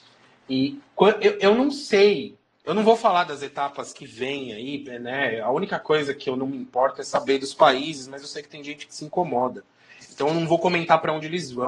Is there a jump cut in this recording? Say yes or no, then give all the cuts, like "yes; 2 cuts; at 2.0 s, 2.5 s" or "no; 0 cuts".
yes; 1 cut; at 2.5 s